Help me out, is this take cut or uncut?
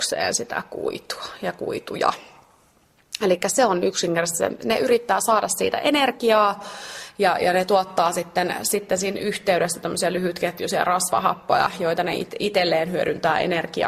uncut